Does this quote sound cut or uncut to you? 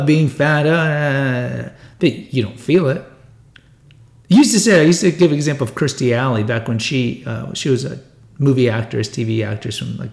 uncut